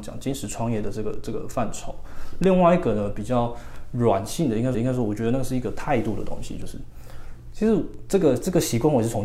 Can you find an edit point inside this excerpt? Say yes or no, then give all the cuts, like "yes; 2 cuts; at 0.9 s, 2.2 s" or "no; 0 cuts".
yes; 1 cut; at 4.7 s